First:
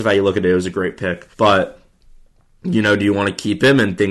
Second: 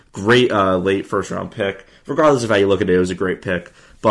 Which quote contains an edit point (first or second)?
first